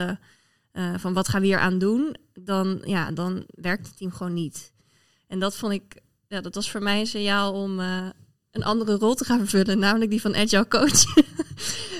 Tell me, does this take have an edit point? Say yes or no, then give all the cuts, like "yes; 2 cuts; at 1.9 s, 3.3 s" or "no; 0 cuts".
no; 0 cuts